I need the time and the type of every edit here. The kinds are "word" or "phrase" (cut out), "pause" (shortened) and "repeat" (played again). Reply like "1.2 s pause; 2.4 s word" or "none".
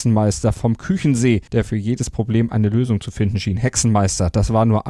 1.5 s pause